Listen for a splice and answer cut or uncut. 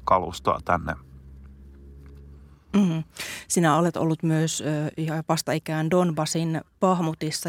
uncut